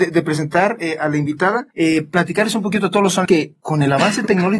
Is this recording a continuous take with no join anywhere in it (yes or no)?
no